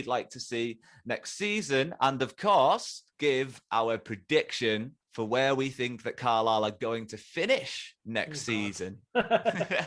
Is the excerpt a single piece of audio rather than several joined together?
no; 3 cuts; at 3.1 s, 5.0 s, 8.0 s

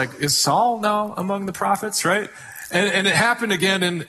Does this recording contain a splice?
no; 0 cuts

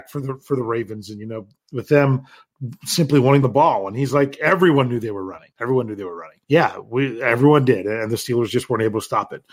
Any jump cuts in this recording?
yes; 3 cuts; at 3.4 s, 5.5 s, 6.4 s

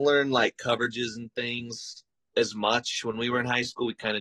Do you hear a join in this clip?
no; 0 cuts

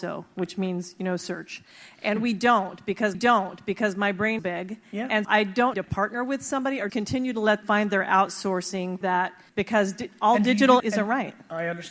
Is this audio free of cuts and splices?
no; 9 cuts; at 3.1 s, 4.4 s, 5.2 s, 5.7 s, 6.9 s, 7.6 s, 9.0 s, 9.5 s, 10.8 s

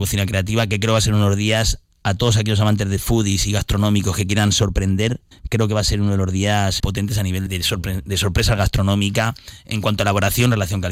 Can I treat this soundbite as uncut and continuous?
no; 3 cuts; at 5.3 s, 6.8 s, 7.5 s

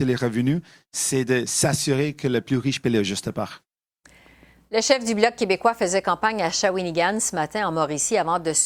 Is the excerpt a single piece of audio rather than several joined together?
yes; 0 cuts

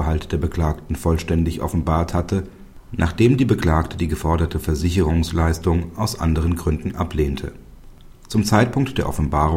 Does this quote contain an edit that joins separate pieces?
no; 0 cuts

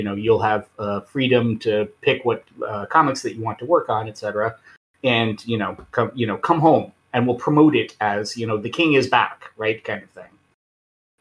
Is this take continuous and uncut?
yes; 0 cuts

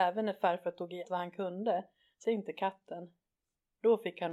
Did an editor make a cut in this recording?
yes; 2 cuts; at 1.0 s, 2.2 s

